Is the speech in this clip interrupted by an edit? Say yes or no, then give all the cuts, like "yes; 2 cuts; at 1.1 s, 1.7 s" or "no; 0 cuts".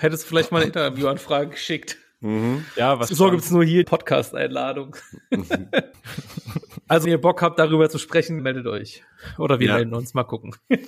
yes; 5 cuts; at 3.1 s, 3.8 s, 5.9 s, 7.0 s, 8.4 s